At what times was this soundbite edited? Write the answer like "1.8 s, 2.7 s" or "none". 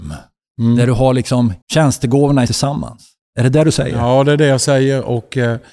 1.6 s, 2.5 s